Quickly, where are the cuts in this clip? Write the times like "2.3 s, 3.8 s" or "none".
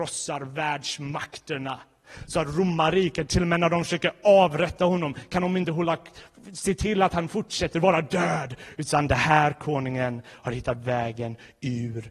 none